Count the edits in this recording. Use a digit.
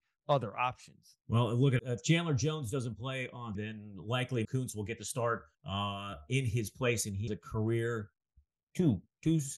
6